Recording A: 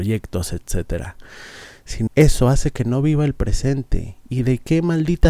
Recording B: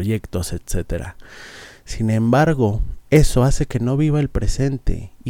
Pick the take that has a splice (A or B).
A